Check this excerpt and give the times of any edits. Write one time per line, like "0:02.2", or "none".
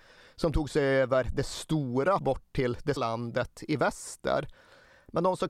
0:02.2
0:03.0